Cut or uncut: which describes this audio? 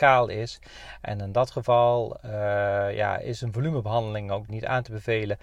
cut